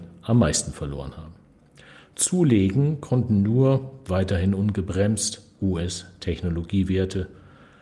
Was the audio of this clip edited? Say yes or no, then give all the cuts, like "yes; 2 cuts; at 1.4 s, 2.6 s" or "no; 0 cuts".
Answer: no; 0 cuts